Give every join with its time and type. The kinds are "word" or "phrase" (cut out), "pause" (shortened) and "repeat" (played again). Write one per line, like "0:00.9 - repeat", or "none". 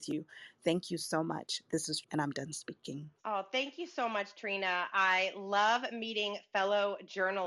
0:02.0 - word
0:03.2 - pause